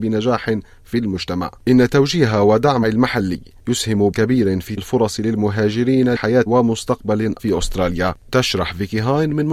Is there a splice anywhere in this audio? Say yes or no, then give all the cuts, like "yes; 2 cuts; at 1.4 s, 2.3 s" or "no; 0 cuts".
yes; 6 cuts; at 2.8 s, 4.1 s, 4.8 s, 6.1 s, 6.5 s, 7.4 s